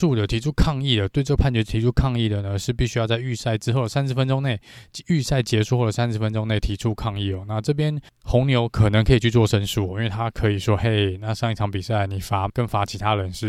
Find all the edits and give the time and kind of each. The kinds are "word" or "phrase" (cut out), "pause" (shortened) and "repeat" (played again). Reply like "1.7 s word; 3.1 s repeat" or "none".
8.1 s pause; 12.5 s word